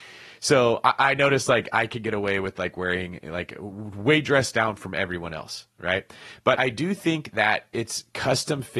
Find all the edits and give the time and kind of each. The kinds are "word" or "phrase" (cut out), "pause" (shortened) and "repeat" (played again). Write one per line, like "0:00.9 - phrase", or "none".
0:06.6 - word